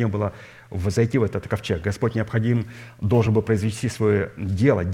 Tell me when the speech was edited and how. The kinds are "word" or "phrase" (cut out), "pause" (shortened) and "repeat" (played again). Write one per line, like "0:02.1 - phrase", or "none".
none